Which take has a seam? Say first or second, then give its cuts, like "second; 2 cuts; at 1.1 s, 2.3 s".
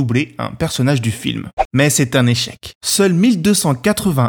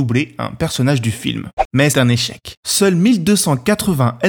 second; 1 cut; at 1.9 s